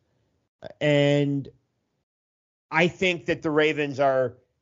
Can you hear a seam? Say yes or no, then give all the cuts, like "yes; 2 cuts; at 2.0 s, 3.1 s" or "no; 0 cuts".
no; 0 cuts